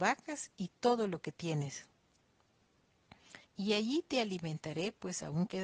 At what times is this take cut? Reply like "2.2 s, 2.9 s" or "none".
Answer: 3.4 s